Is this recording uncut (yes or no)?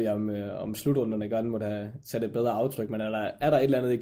yes